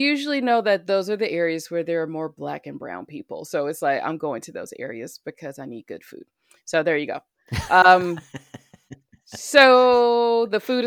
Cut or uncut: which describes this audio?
uncut